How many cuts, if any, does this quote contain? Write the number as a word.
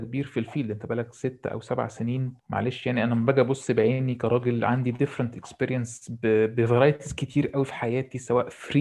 one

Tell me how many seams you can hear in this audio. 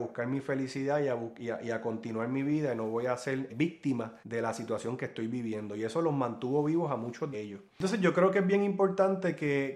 four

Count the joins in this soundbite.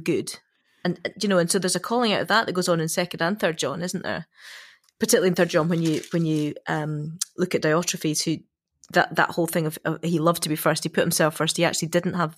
zero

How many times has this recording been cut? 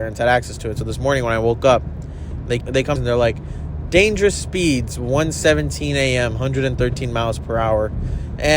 two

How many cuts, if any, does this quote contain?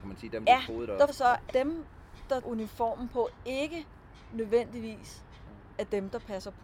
three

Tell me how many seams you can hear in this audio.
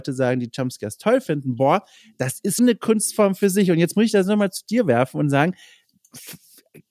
one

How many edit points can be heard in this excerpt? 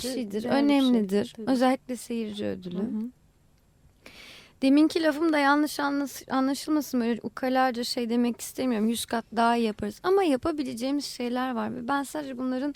zero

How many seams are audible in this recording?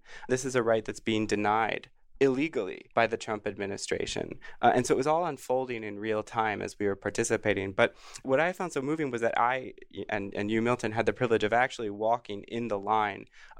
one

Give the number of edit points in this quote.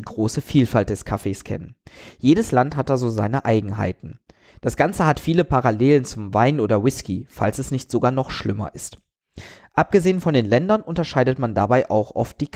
zero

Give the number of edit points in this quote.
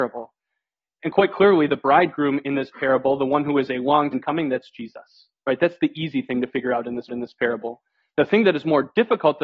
two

